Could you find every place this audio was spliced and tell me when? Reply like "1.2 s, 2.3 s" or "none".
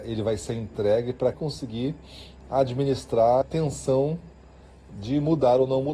1.3 s, 3.4 s